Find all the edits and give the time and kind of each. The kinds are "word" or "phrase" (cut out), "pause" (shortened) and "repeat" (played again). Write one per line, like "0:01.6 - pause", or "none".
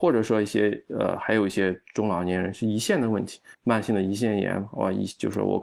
0:03.5 - pause